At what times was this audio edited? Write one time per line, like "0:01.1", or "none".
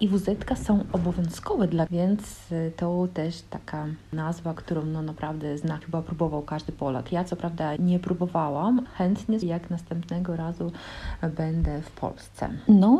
0:01.9
0:04.6
0:05.8
0:07.8
0:08.9
0:09.4